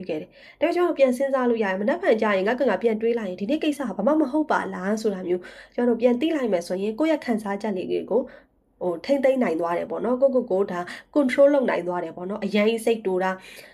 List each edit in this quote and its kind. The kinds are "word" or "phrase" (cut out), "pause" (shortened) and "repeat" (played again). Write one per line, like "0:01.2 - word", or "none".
none